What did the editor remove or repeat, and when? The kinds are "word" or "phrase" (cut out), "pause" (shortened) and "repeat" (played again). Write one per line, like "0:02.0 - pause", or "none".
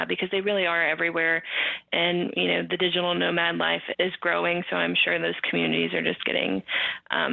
0:03.9 - word